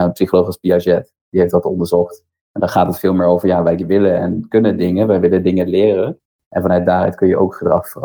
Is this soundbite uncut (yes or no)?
yes